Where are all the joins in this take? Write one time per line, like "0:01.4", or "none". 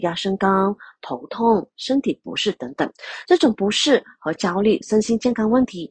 none